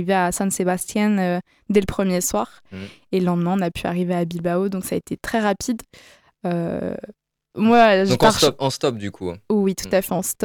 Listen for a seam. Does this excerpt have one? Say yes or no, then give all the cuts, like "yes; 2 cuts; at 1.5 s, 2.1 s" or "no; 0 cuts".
no; 0 cuts